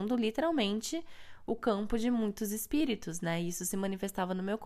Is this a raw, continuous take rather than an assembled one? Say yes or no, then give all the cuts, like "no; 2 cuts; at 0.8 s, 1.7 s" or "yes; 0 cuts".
yes; 0 cuts